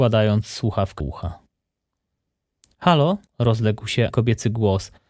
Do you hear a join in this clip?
yes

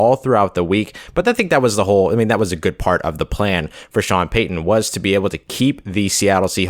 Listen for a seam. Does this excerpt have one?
no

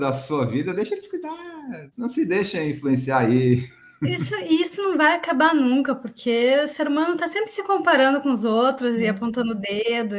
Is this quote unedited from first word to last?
yes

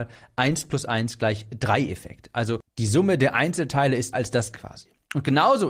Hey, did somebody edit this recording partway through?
yes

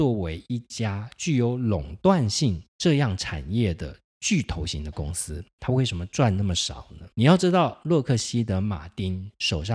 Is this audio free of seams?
no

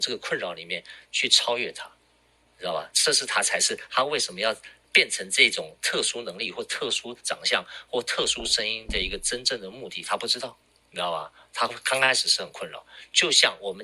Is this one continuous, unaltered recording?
yes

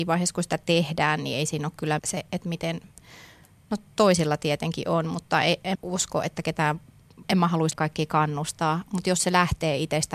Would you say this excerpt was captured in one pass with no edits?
no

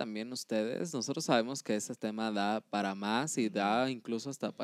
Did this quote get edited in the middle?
no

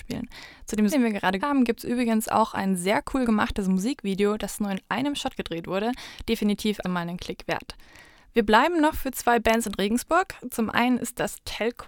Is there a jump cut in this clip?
yes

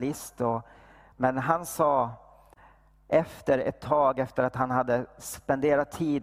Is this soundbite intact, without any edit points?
yes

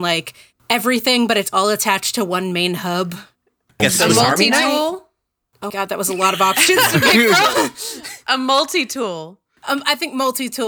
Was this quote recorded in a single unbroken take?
no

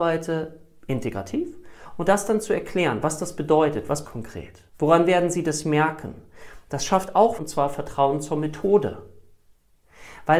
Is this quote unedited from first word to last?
no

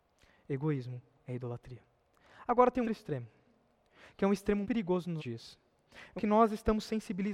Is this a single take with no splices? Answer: no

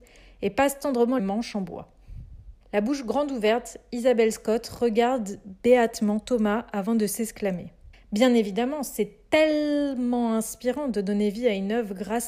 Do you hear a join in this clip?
yes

